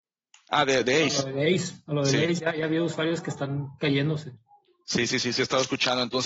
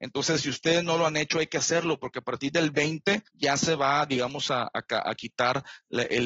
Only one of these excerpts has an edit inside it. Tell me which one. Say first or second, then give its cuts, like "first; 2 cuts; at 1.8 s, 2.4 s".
second; 1 cut; at 3.3 s